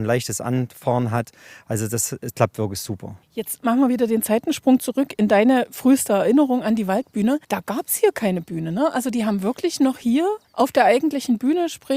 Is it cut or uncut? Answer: cut